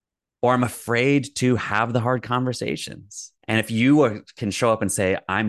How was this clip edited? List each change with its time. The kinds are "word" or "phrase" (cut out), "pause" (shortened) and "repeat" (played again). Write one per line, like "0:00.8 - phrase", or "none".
0:03.4 - pause